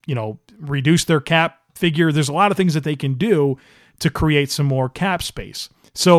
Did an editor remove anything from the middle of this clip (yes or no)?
no